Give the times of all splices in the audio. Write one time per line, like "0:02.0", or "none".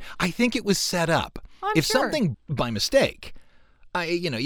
0:02.3